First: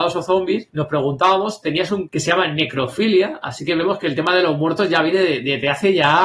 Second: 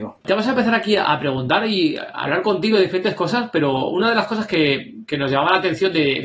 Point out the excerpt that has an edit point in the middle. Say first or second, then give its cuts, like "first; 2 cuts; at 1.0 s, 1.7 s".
first; 1 cut; at 2.1 s